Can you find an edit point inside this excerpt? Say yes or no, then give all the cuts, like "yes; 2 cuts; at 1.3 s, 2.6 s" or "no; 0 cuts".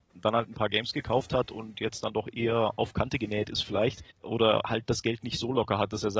yes; 1 cut; at 4.1 s